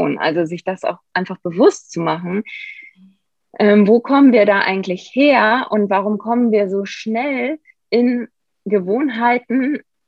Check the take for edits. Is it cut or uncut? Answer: uncut